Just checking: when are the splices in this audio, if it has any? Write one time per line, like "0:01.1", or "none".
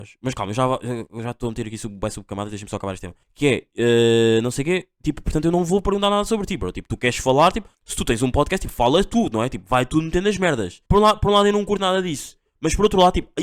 0:03.2
0:07.7
0:10.9